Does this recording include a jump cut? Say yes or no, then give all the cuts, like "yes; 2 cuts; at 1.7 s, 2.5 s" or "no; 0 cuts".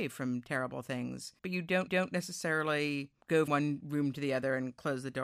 yes; 3 cuts; at 1.4 s, 1.9 s, 3.5 s